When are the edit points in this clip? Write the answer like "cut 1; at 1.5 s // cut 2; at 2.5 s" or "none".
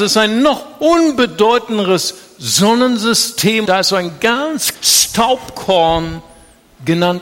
cut 1; at 3.7 s // cut 2; at 4.7 s